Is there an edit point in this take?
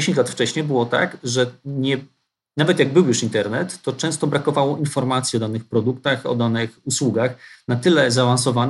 no; 0 cuts

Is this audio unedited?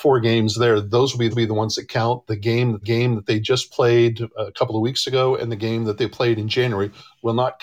no; 2 cuts; at 1.3 s, 2.8 s

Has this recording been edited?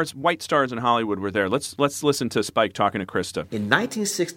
no; 0 cuts

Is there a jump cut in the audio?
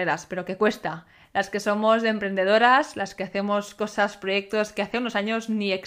no; 0 cuts

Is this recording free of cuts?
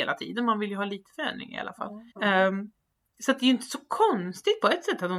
no; 1 cut; at 2.1 s

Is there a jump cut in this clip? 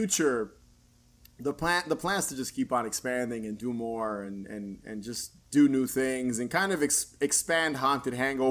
no; 0 cuts

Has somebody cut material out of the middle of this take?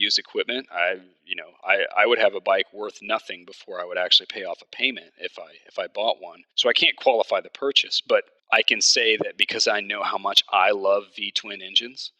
yes; 2 cuts; at 6.5 s, 8.4 s

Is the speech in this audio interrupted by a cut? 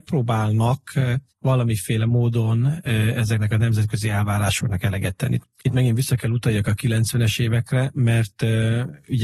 yes; 1 cut; at 1.3 s

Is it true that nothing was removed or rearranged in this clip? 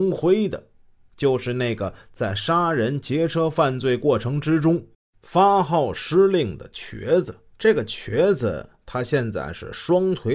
no; 2 cuts; at 4.9 s, 7.5 s

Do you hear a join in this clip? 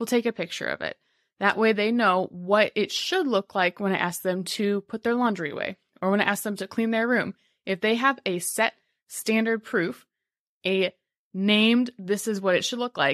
no; 0 cuts

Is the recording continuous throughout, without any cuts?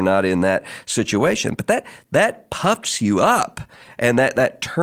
yes; 0 cuts

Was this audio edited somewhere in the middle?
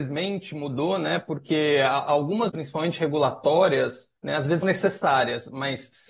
yes; 3 cuts; at 2.5 s, 4.2 s, 4.6 s

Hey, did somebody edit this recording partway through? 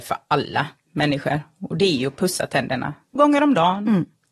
yes; 1 cut; at 3.2 s

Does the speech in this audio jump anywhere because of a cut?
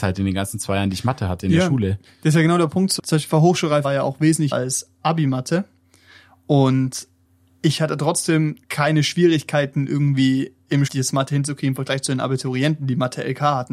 yes; 6 cuts; at 3.0 s, 3.8 s, 4.5 s, 7.3 s, 8.6 s, 10.9 s

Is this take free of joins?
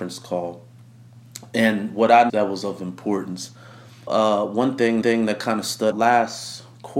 no; 4 cuts; at 2.3 s, 4.1 s, 5.0 s, 5.9 s

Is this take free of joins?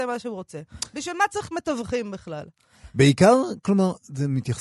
yes; 0 cuts

